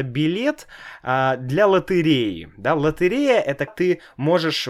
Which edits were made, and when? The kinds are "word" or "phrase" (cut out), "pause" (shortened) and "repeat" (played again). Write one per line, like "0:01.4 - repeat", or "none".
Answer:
0:03.7 - word